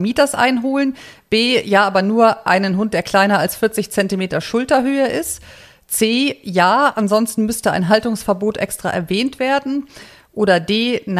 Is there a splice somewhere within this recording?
no; 0 cuts

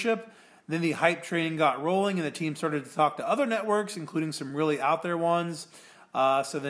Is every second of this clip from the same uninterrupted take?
yes; 0 cuts

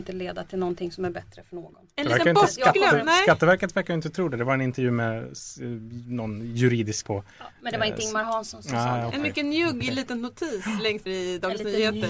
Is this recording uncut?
no; 2 cuts; at 7.0 s, 11.1 s

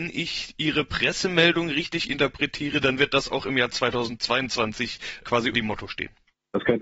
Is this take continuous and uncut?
no; 1 cut; at 5.5 s

